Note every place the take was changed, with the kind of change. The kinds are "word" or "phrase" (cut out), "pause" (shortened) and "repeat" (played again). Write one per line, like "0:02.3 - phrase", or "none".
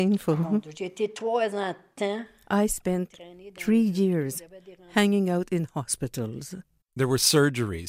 0:06.8 - pause